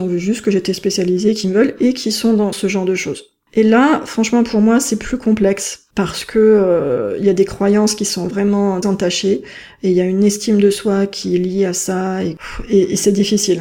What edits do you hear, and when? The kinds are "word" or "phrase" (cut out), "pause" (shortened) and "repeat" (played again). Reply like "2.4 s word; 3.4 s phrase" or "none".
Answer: 2.5 s word; 8.8 s word